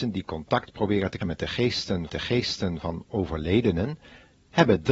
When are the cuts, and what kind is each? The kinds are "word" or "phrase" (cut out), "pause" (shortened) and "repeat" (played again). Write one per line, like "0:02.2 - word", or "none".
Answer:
0:01.2 - word
0:02.1 - repeat